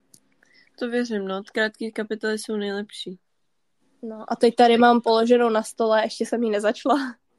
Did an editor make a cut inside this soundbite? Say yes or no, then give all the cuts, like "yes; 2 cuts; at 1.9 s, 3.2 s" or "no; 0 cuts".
no; 0 cuts